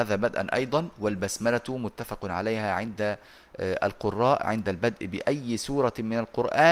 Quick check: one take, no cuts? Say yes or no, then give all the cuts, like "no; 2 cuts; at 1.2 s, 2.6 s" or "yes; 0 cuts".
yes; 0 cuts